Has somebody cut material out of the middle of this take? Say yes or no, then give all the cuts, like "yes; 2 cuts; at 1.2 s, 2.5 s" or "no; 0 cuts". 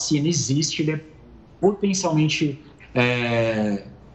no; 0 cuts